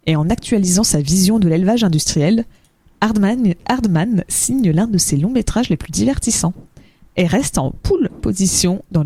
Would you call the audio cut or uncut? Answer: uncut